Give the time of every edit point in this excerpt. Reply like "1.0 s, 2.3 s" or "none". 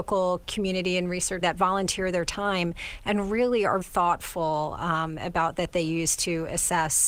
1.4 s, 3.8 s, 5.6 s